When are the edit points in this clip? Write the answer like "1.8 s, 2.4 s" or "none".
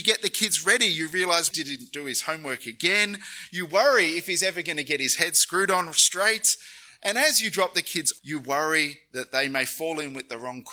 1.5 s, 8.2 s